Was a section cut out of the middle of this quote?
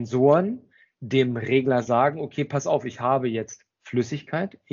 no; 0 cuts

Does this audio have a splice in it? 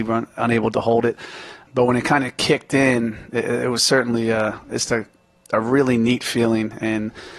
no; 0 cuts

